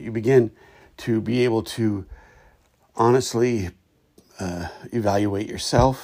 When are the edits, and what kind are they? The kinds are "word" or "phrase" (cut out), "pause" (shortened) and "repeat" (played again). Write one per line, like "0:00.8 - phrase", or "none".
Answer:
none

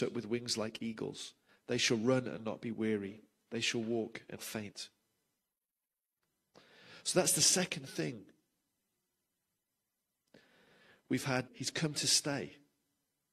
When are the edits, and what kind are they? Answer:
0:04.4 - word
0:11.5 - word

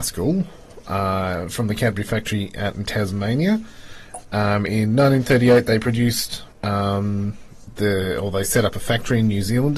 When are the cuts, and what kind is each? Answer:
0:06.5 - pause

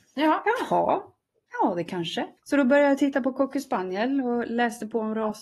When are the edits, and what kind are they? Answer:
0:02.4 - pause

